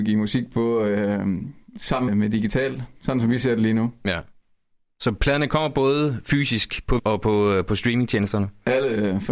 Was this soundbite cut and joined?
yes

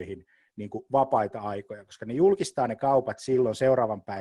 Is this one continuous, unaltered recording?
yes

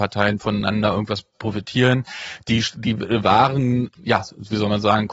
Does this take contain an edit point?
no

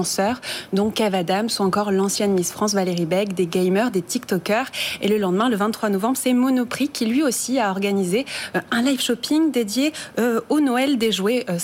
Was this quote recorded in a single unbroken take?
yes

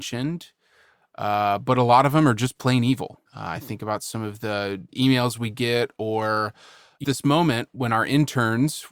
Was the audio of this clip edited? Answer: yes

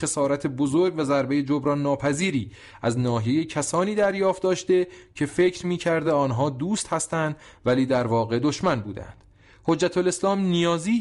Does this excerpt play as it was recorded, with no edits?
yes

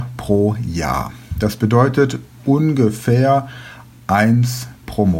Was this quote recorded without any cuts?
yes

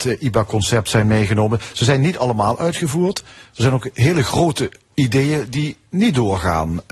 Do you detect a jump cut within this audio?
no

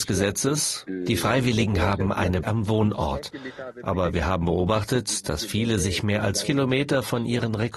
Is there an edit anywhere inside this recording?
yes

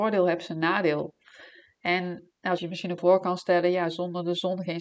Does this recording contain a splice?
yes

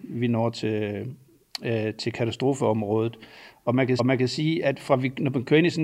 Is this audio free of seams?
no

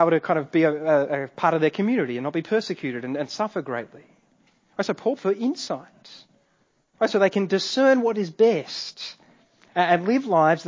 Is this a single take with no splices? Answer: no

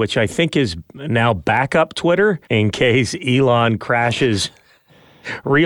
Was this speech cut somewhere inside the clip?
yes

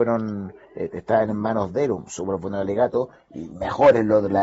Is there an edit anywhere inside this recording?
no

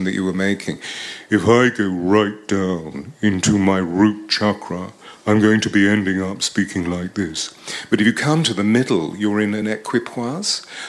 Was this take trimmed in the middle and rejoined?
no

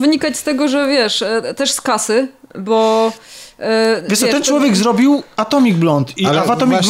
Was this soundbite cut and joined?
no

